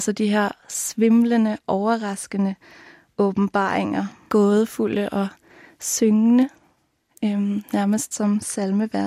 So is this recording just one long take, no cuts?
no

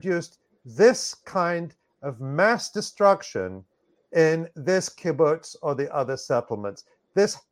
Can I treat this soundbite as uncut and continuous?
yes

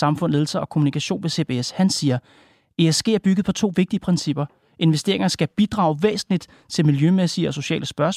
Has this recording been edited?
no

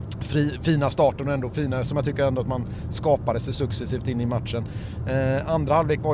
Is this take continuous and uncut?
no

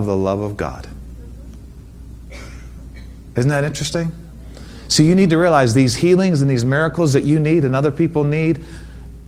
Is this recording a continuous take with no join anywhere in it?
yes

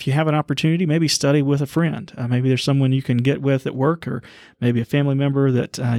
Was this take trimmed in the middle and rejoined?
no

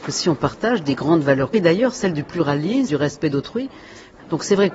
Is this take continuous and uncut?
no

